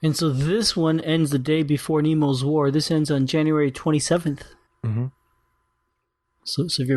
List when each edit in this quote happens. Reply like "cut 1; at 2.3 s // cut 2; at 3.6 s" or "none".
cut 1; at 4.7 s